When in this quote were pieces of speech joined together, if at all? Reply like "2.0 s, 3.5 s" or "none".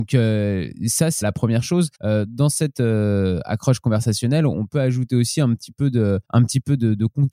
1.2 s, 1.9 s, 6.2 s